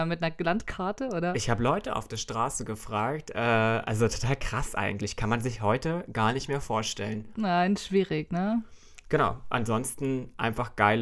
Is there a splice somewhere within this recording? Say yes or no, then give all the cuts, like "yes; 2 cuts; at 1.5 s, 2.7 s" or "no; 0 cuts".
no; 0 cuts